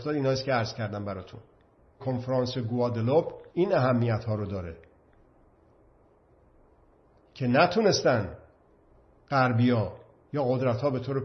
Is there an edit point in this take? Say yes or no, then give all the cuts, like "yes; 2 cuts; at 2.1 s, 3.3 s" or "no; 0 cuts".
yes; 2 cuts; at 2.0 s, 3.5 s